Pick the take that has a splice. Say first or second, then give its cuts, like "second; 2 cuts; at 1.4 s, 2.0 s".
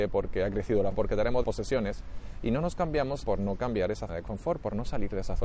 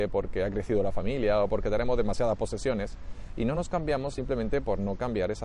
first; 4 cuts; at 0.9 s, 1.4 s, 3.2 s, 4.1 s